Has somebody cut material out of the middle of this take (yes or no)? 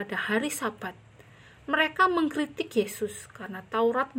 no